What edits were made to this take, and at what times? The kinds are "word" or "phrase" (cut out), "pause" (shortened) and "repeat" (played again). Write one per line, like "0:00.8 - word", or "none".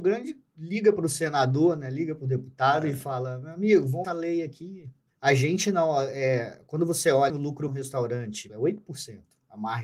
0:04.0 - phrase
0:05.1 - pause
0:07.3 - word
0:07.7 - word
0:08.5 - phrase